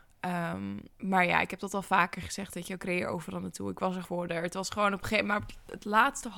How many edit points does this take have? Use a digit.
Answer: 2